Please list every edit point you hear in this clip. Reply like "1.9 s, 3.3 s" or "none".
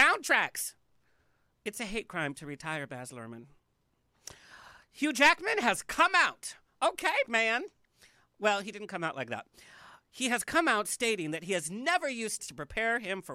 7.3 s, 12.4 s